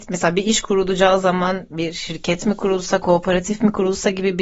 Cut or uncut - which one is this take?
uncut